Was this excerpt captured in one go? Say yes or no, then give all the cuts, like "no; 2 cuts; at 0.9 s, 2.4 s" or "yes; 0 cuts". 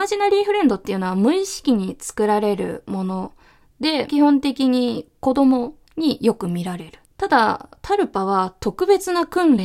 no; 2 cuts; at 4.1 s, 5.9 s